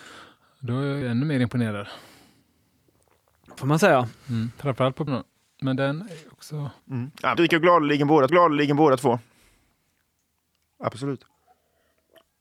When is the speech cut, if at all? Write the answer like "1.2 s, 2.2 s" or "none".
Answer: 1.0 s, 3.6 s, 5.1 s, 6.8 s, 7.3 s, 8.3 s